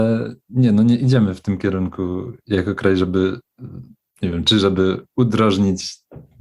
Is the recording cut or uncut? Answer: uncut